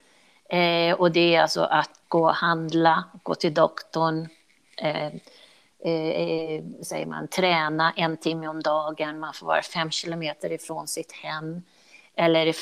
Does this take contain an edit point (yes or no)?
yes